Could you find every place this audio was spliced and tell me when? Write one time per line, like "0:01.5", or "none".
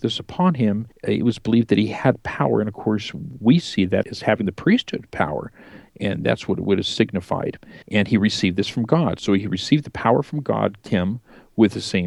0:00.9
0:04.0
0:07.8
0:10.8